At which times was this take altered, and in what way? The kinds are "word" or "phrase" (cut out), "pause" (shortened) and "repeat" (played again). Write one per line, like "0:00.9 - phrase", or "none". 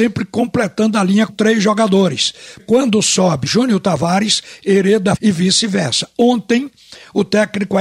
0:01.3 - word
0:02.6 - word
0:03.5 - word
0:05.2 - word